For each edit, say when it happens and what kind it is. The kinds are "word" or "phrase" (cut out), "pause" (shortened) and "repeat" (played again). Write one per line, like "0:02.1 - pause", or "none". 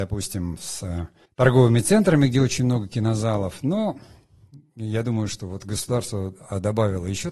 0:01.3 - pause